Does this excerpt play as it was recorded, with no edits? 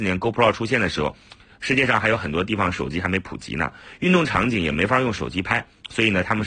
yes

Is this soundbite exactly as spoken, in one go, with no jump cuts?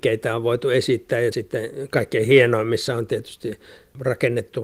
yes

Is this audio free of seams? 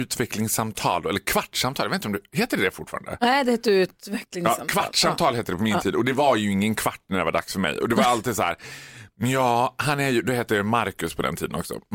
yes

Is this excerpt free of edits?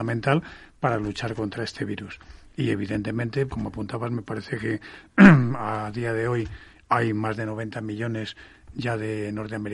no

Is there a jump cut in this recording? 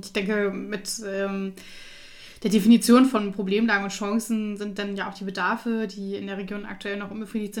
no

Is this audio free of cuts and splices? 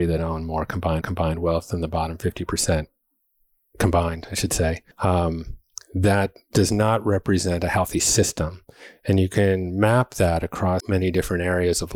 no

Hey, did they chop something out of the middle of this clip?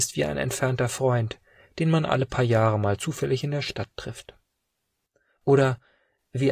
no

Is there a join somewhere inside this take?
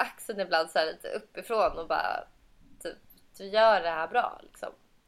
no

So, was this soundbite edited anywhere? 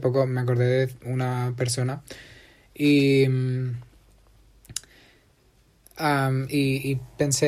no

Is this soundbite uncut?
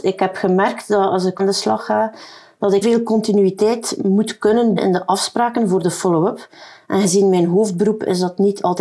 no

